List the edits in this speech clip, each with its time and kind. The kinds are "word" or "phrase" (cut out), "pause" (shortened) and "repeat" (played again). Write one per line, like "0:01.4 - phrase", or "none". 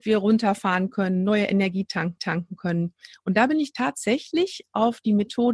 0:02.2 - repeat